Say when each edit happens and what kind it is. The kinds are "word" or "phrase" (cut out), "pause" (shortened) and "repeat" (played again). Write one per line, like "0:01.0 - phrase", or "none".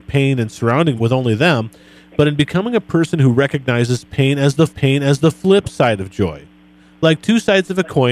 0:01.0 - word
0:04.7 - repeat